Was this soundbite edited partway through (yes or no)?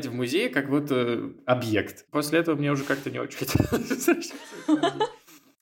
no